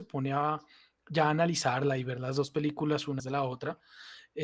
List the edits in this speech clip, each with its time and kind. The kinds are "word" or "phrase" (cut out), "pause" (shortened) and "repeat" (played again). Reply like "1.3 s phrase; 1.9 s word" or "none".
3.2 s word